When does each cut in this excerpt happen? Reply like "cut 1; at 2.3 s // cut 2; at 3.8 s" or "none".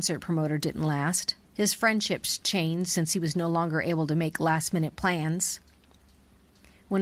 cut 1; at 1.4 s